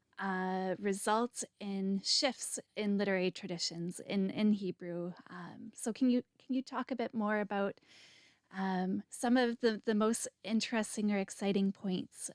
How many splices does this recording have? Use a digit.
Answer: 2